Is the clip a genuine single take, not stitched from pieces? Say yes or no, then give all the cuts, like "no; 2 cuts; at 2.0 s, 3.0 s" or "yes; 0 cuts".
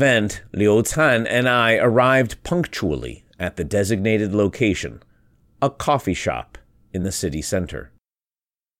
yes; 0 cuts